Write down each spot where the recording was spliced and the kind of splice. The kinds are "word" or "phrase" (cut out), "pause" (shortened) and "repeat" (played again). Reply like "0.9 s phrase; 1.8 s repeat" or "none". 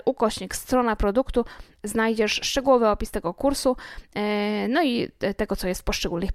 none